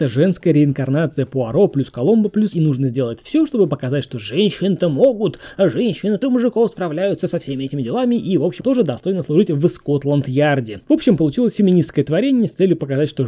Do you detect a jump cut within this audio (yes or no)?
yes